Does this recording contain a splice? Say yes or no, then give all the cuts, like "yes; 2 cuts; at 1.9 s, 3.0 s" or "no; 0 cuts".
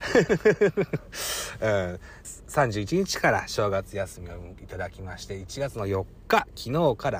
yes; 1 cut; at 2.2 s